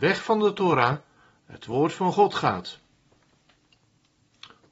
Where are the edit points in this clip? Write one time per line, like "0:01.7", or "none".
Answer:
none